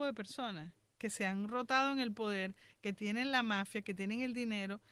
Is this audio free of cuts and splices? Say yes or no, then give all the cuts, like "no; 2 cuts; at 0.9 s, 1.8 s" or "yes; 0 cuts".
yes; 0 cuts